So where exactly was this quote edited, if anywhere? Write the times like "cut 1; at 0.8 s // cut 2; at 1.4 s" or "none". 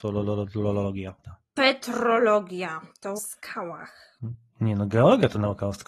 cut 1; at 1.2 s // cut 2; at 1.5 s // cut 3; at 3.2 s